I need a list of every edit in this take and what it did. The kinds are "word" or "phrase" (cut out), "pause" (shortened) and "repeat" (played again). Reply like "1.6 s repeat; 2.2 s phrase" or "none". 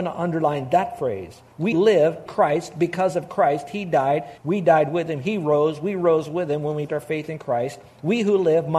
1.7 s word; 2.3 s word; 4.4 s pause; 6.9 s word